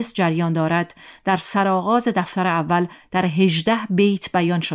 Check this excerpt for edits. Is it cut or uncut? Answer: uncut